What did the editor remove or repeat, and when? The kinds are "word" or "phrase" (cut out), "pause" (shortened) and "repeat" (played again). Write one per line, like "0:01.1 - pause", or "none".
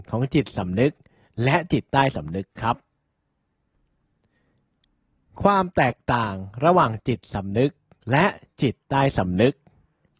none